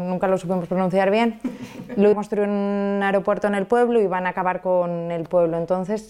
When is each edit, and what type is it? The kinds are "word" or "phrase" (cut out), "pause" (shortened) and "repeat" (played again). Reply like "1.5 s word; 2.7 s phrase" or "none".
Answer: 2.1 s phrase